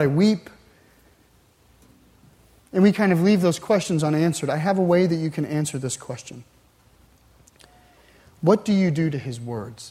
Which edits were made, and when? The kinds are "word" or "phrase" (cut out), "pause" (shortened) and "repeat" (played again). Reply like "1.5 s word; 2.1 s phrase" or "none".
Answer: none